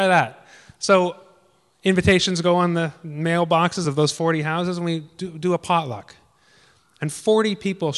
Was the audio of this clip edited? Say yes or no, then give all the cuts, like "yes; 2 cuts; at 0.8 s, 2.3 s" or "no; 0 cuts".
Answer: no; 0 cuts